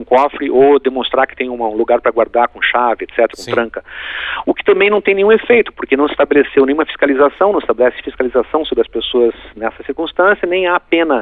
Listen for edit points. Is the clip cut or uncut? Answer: cut